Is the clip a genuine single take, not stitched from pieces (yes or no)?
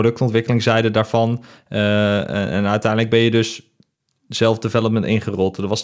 yes